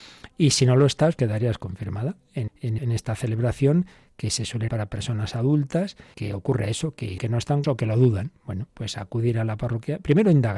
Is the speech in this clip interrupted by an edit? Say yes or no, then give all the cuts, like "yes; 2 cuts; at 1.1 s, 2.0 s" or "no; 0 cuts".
yes; 8 cuts; at 1.2 s, 2.5 s, 2.8 s, 4.7 s, 6.1 s, 7.2 s, 7.6 s, 8.7 s